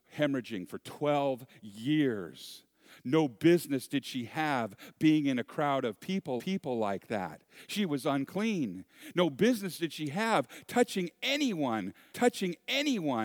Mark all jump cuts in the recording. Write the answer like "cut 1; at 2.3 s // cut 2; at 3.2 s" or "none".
cut 1; at 6.4 s // cut 2; at 12.1 s